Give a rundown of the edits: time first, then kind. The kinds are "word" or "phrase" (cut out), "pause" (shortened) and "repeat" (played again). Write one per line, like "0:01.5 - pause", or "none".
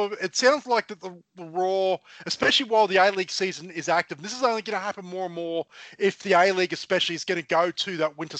none